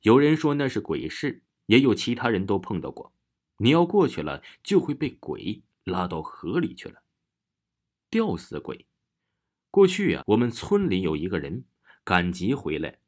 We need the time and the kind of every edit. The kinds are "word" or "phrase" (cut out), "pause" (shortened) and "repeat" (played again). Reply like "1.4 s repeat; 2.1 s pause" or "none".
10.2 s word